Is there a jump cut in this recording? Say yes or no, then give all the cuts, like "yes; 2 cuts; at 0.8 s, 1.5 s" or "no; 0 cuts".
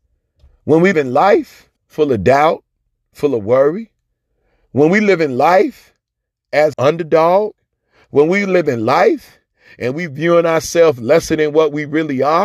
yes; 3 cuts; at 0.9 s, 1.8 s, 6.7 s